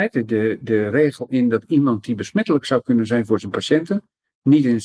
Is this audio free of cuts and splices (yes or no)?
yes